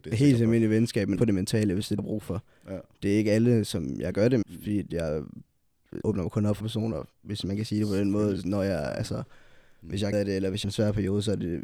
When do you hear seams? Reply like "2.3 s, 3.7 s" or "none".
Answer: 1.2 s, 2.0 s, 4.4 s, 6.0 s, 6.6 s, 10.1 s, 10.6 s